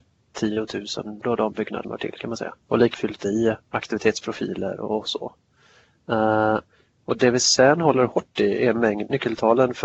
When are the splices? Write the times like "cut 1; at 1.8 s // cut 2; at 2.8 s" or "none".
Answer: cut 1; at 1.2 s // cut 2; at 1.8 s // cut 3; at 2.6 s // cut 4; at 2.9 s // cut 5; at 3.6 s